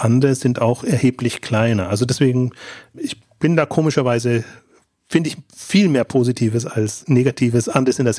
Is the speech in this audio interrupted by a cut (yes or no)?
no